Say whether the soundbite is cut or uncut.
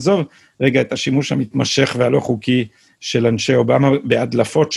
uncut